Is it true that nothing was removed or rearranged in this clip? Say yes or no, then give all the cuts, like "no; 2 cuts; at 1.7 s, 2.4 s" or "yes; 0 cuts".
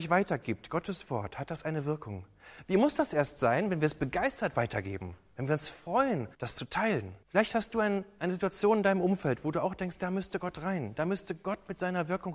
no; 2 cuts; at 6.3 s, 7.2 s